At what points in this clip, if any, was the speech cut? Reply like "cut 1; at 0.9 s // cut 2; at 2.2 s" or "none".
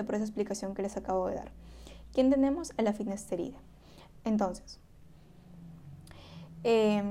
none